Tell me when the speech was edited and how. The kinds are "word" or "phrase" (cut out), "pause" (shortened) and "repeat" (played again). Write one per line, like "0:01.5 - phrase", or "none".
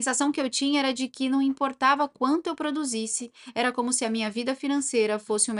none

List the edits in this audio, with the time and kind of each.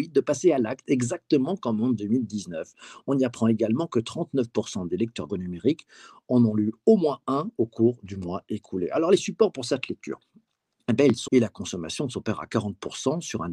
0:05.3 - word
0:11.3 - word

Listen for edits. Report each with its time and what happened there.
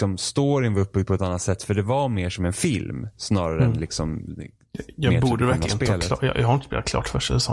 none

